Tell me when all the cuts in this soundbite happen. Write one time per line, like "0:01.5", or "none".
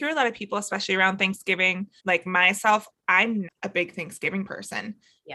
0:02.0
0:03.4